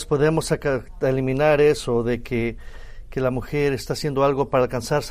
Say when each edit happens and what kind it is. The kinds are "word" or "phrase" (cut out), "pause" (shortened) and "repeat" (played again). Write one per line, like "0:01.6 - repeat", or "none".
none